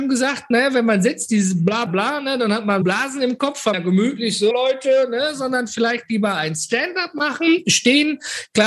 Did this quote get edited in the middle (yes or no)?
yes